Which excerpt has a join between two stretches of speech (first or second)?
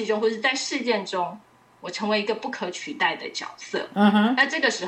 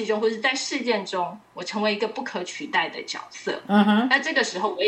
second